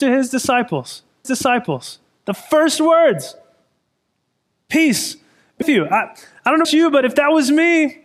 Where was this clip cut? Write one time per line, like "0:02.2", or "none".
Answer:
0:01.2
0:05.6
0:06.6